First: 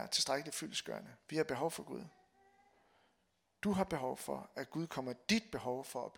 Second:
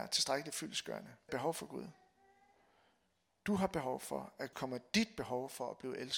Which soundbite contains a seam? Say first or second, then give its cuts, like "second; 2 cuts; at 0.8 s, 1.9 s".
second; 2 cuts; at 1.3 s, 4.5 s